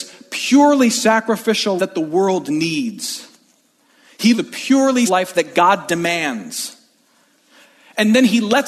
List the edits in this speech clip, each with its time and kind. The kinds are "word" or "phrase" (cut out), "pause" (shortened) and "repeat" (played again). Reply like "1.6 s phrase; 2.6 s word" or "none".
1.8 s word; 4.3 s word; 5.1 s word